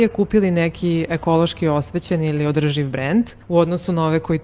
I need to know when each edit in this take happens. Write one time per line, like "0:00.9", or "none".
0:03.4